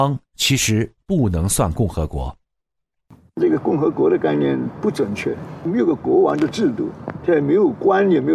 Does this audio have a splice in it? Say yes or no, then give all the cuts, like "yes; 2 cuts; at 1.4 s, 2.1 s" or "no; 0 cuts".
no; 0 cuts